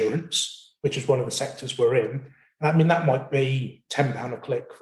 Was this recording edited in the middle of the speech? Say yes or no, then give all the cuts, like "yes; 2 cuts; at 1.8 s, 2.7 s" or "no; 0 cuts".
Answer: no; 0 cuts